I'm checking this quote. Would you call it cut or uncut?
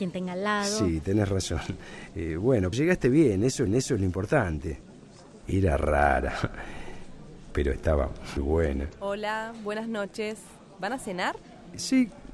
cut